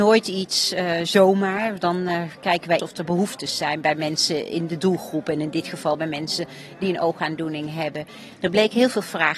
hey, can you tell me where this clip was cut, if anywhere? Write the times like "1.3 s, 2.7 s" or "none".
2.8 s